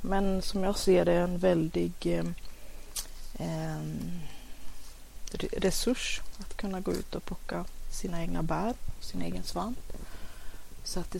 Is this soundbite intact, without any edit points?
yes; 0 cuts

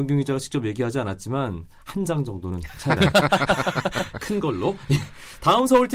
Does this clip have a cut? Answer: yes; 1 cut; at 3.0 s

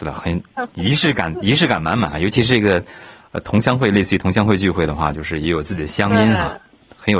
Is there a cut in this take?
no; 0 cuts

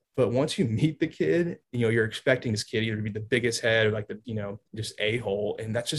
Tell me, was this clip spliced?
yes; 3 cuts; at 1.6 s, 4.2 s, 4.7 s

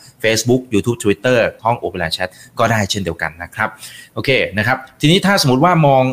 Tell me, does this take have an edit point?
yes; 1 cut; at 1.6 s

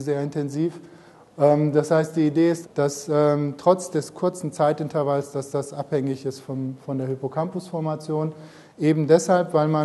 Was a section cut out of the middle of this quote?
yes; 1 cut; at 2.6 s

